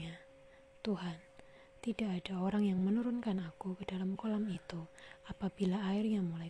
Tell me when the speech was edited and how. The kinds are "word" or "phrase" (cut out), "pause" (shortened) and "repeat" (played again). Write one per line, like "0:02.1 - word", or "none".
none